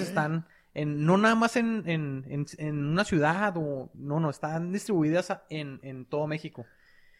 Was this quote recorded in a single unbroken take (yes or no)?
yes